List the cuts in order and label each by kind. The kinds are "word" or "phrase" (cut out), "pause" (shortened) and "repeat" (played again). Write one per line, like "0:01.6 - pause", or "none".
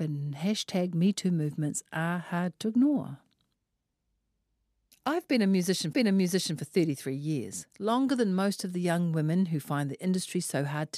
0:05.9 - repeat